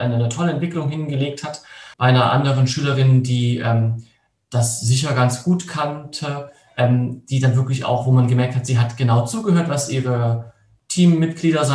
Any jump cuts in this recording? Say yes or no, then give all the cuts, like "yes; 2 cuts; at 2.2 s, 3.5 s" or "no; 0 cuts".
yes; 1 cut; at 1.9 s